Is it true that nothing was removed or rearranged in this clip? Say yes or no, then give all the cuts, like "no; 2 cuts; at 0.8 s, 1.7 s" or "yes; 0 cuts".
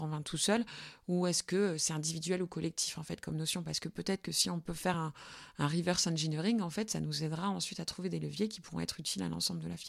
yes; 0 cuts